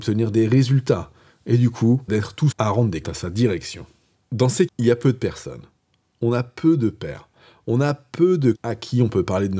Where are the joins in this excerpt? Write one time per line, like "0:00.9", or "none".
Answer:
0:02.1
0:02.5
0:03.0
0:04.7
0:08.5